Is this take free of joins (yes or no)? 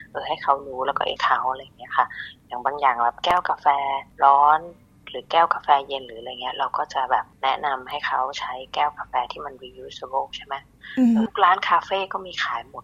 no